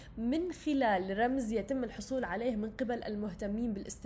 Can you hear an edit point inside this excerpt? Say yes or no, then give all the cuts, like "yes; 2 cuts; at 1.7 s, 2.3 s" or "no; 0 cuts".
no; 0 cuts